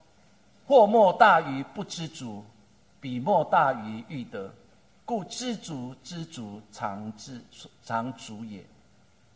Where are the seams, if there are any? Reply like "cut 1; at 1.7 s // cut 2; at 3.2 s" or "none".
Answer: none